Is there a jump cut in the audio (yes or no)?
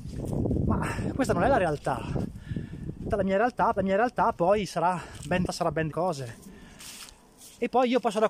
yes